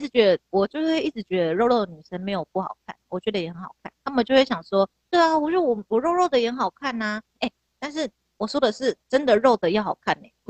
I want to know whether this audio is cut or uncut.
cut